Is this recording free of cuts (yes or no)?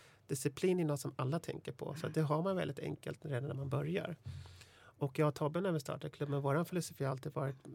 yes